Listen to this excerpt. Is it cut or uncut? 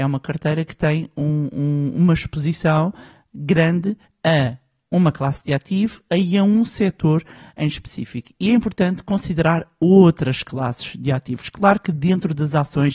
uncut